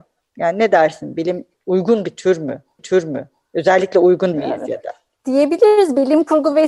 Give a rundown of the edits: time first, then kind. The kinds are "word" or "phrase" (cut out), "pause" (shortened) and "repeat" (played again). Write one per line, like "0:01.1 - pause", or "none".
0:01.5 - phrase
0:02.8 - repeat
0:04.3 - word